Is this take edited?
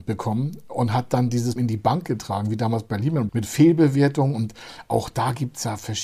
yes; 2 cuts; at 1.6 s, 3.3 s

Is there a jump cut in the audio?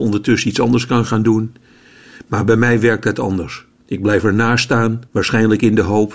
yes; 2 cuts; at 3.8 s, 5.1 s

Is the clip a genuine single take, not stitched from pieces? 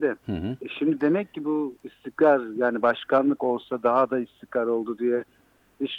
yes; 0 cuts

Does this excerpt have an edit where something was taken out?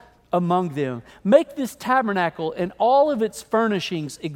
no; 0 cuts

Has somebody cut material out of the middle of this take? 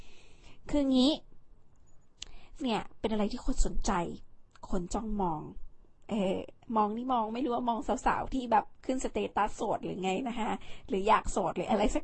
yes; 1 cut; at 2.6 s

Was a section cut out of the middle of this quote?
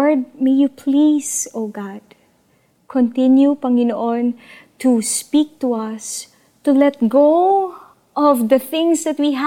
no; 0 cuts

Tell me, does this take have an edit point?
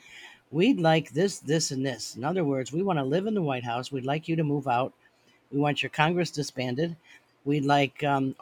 no; 0 cuts

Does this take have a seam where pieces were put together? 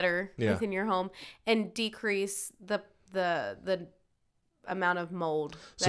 no; 0 cuts

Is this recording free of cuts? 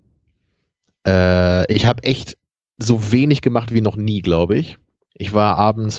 yes; 0 cuts

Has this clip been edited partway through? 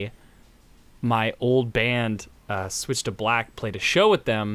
no; 0 cuts

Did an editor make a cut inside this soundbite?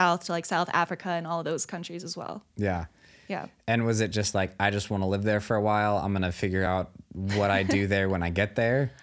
no; 0 cuts

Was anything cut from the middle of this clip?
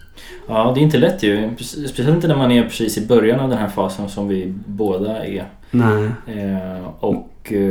no; 0 cuts

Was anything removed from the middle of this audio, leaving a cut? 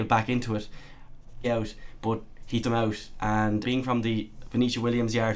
yes; 3 cuts; at 1.4 s, 2.6 s, 3.6 s

